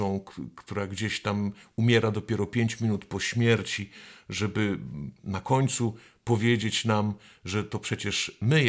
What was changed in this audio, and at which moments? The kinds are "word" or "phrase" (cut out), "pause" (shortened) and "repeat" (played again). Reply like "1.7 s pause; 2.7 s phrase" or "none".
none